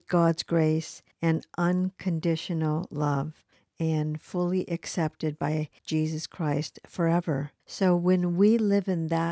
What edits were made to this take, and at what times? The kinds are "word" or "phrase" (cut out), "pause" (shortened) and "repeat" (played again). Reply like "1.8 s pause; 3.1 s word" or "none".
1.1 s pause; 3.5 s pause; 5.8 s pause; 7.6 s pause